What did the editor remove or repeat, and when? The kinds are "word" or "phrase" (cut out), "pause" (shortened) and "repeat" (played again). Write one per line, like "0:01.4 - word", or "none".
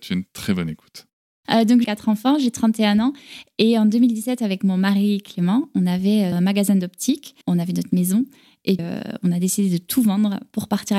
0:01.2 - pause
0:01.8 - phrase
0:06.3 - word
0:07.4 - pause
0:08.8 - word